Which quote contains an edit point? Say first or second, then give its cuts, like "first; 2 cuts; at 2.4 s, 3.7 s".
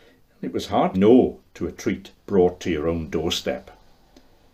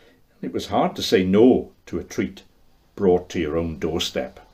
first; 2 cuts; at 0.9 s, 2.2 s